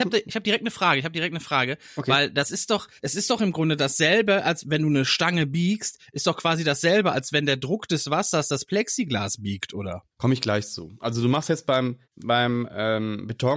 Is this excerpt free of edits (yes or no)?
no